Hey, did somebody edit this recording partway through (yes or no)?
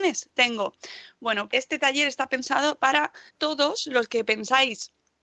yes